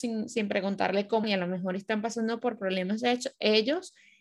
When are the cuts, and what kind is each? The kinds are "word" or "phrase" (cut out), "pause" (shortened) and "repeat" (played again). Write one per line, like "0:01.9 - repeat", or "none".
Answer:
0:01.2 - word